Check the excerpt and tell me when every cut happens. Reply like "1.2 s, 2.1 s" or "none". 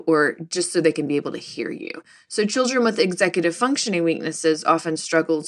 none

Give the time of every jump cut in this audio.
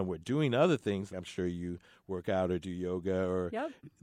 1.1 s

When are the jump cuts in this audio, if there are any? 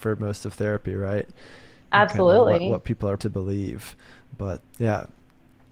3.2 s, 4.6 s

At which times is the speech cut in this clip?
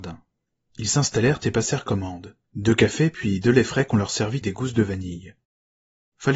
2.4 s, 4.4 s

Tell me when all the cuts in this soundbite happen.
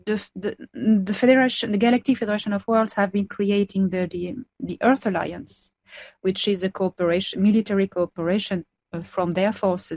none

